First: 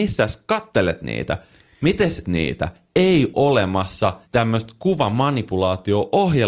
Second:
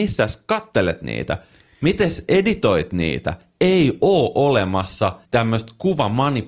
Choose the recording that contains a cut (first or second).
first